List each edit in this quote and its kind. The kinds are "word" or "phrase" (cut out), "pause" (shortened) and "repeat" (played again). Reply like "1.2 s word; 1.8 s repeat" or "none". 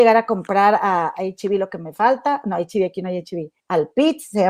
3.6 s pause